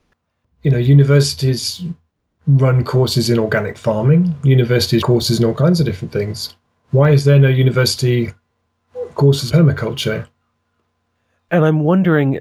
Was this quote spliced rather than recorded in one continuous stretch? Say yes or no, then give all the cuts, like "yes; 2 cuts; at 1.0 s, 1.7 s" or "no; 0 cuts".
yes; 2 cuts; at 5.0 s, 9.5 s